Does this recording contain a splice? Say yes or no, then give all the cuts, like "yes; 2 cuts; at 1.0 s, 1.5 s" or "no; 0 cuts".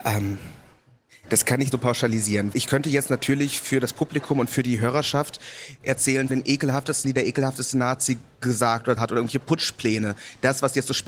yes; 5 cuts; at 1.7 s, 2.5 s, 6.3 s, 7.0 s, 9.0 s